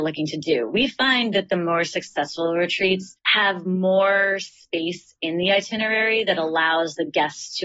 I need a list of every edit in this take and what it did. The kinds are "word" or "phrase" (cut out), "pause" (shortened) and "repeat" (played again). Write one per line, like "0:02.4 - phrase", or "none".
0:03.2 - pause